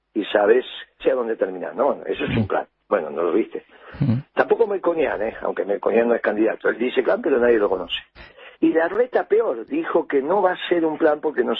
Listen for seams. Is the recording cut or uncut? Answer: cut